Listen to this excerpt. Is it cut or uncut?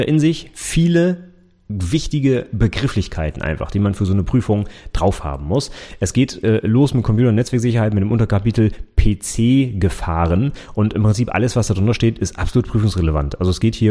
uncut